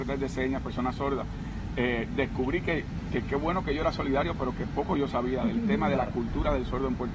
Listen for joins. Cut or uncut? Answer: uncut